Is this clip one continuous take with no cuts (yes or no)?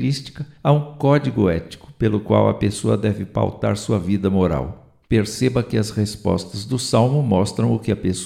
no